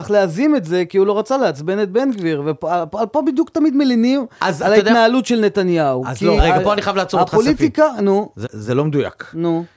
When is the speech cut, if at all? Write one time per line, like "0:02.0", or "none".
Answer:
0:06.4
0:08.4